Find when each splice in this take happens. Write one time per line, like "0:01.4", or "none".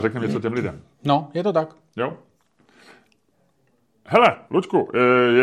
none

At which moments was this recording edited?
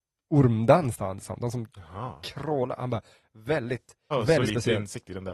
0:01.0
0:04.1

